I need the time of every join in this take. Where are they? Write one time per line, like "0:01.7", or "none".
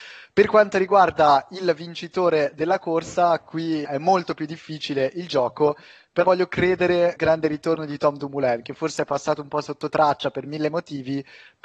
0:03.8
0:06.2
0:07.2